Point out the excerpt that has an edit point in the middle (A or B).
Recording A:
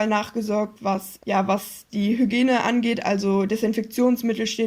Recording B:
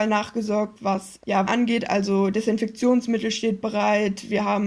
B